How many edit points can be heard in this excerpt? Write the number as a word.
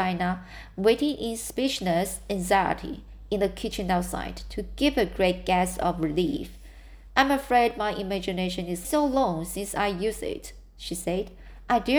one